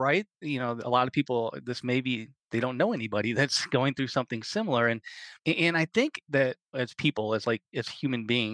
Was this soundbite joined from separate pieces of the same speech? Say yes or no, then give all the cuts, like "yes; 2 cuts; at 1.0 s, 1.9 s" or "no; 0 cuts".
yes; 2 cuts; at 5.4 s, 6.6 s